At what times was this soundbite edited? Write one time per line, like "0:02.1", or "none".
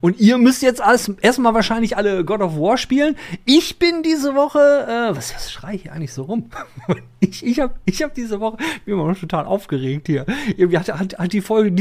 none